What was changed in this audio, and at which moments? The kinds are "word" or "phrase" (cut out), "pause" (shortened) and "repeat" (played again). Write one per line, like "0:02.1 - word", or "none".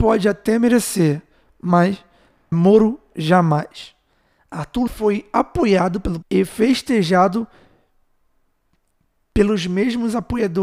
0:02.5 - word
0:04.9 - word
0:06.2 - word